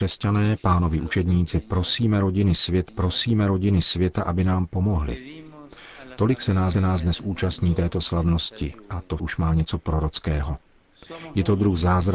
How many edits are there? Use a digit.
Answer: 3